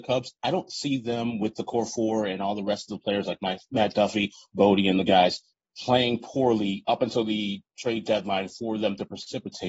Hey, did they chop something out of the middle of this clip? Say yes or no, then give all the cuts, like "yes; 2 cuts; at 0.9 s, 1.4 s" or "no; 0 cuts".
yes; 2 cuts; at 5.5 s, 7.7 s